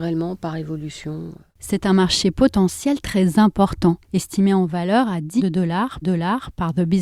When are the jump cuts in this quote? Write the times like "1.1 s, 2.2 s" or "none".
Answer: 4.0 s, 5.4 s, 6.0 s